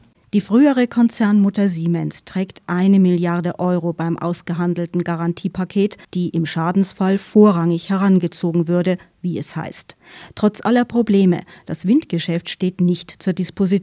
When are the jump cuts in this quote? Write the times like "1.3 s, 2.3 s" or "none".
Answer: 6.0 s